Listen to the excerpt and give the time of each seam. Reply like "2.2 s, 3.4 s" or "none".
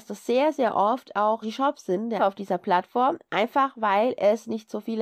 1.4 s, 2.2 s